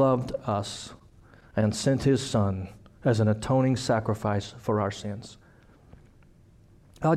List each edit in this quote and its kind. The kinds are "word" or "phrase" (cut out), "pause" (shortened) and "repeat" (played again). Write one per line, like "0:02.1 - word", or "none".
none